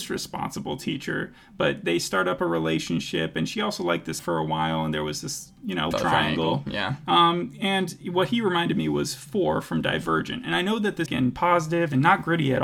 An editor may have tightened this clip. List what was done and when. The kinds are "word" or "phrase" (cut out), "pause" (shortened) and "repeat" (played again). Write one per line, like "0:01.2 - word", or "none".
0:04.2 - phrase
0:05.9 - word
0:11.1 - phrase